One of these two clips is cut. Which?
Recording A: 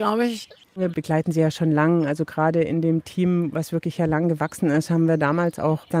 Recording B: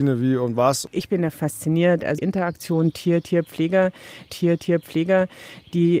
B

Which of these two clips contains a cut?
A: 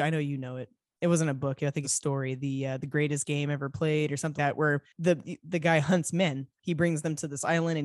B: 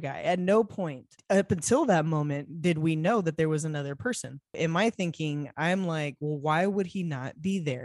A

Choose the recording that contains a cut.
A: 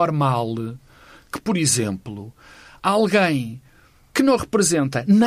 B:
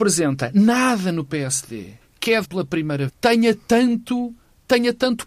B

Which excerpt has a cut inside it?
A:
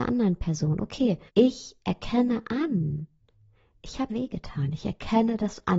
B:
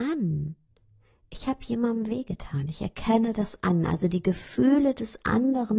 A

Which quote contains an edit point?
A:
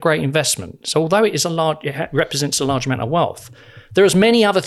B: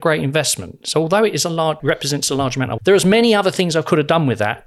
B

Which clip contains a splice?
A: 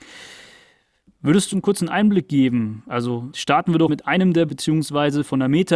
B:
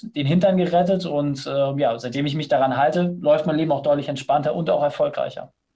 A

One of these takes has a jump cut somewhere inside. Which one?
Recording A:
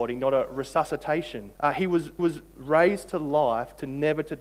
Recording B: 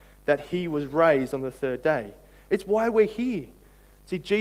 A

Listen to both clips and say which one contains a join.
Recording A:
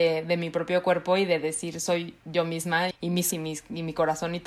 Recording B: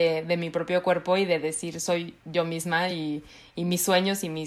A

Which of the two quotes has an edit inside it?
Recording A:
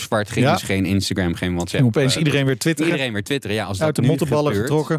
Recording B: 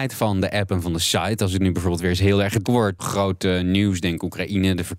B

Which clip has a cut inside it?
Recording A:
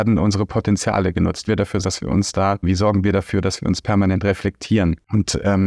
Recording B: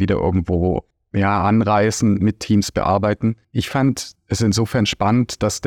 A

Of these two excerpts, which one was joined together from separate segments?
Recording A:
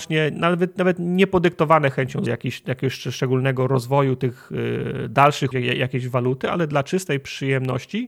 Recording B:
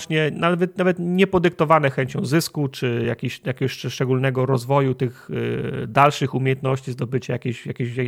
A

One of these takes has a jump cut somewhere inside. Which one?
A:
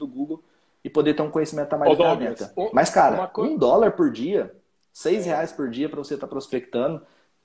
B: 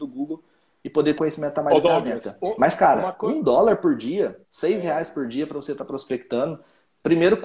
B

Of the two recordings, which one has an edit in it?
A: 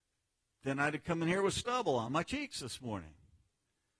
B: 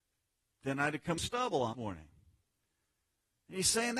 B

